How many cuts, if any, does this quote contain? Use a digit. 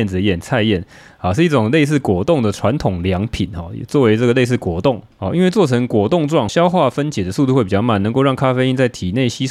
1